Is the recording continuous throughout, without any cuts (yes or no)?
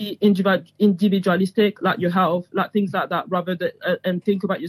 yes